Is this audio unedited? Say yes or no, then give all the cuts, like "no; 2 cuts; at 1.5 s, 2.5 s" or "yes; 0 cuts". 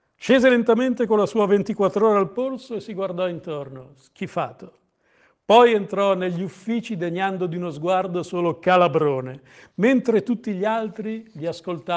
yes; 0 cuts